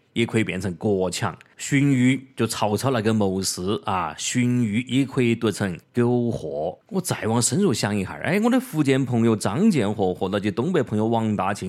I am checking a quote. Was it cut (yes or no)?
no